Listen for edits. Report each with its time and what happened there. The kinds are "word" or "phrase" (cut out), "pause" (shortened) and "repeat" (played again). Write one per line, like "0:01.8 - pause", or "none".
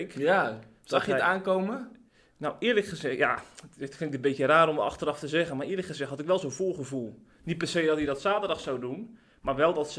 none